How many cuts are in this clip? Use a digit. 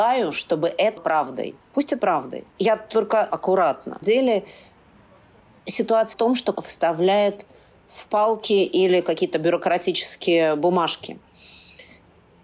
8